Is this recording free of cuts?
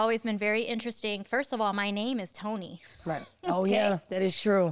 yes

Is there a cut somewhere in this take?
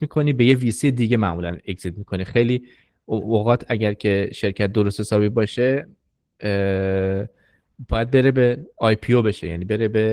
no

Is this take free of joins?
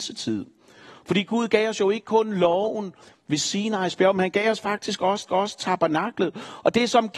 no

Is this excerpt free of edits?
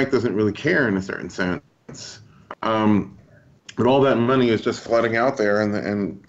no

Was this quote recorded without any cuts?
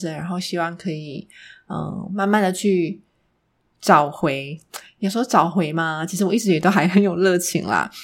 yes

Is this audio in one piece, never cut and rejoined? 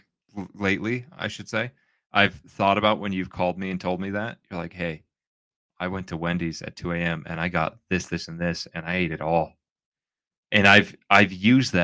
yes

